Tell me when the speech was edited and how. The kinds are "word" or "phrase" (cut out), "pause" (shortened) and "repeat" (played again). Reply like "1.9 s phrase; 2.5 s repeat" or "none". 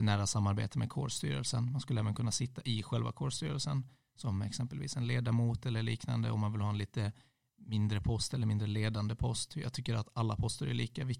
none